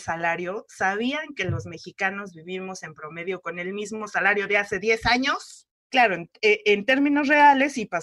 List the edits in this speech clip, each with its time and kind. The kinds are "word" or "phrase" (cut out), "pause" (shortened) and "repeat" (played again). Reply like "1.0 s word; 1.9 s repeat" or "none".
none